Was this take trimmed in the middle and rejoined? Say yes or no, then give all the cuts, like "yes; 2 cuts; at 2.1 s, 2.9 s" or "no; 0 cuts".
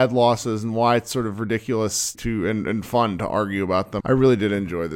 yes; 2 cuts; at 2.1 s, 4.0 s